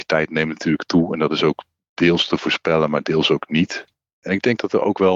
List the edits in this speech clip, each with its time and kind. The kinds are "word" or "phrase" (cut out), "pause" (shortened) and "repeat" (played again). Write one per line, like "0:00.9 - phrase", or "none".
none